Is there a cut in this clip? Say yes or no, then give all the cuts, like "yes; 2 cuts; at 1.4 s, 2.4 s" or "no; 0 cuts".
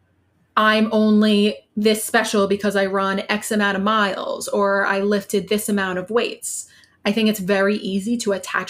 no; 0 cuts